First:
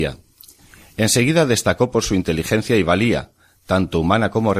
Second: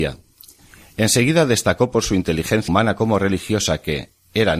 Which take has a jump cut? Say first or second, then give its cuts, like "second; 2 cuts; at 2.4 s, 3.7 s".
second; 1 cut; at 2.7 s